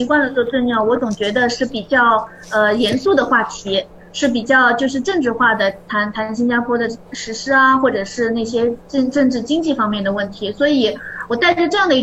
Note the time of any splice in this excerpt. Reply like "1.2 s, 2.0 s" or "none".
8.8 s